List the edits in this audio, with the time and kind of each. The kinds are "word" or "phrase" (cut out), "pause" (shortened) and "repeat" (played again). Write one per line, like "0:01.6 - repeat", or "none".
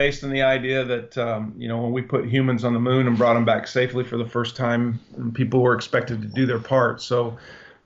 none